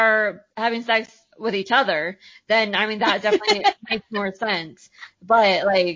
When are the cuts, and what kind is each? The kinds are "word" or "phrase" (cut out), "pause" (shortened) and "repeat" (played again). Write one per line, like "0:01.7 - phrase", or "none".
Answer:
none